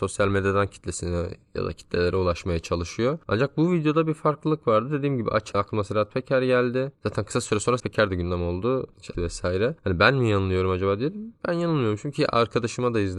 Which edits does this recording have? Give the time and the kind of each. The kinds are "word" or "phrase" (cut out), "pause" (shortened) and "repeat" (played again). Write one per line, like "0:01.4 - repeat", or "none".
0:05.5 - word
0:06.9 - pause
0:07.8 - word
0:09.1 - phrase